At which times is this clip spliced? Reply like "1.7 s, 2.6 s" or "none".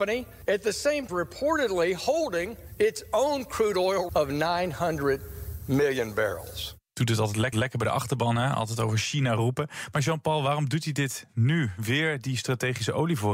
1.1 s, 4.1 s, 7.5 s